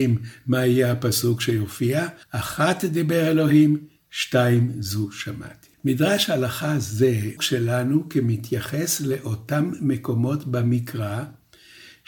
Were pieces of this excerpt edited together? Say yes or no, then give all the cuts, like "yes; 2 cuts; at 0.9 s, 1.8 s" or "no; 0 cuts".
yes; 3 cuts; at 2.2 s, 5.7 s, 7.4 s